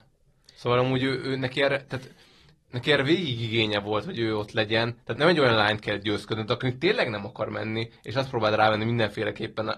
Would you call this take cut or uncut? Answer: cut